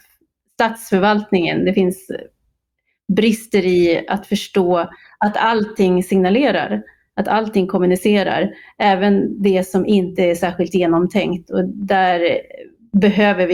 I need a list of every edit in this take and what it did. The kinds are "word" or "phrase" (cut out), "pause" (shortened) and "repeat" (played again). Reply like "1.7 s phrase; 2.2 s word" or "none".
none